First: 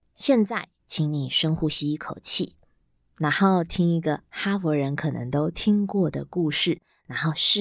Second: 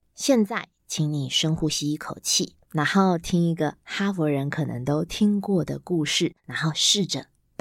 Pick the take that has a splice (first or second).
second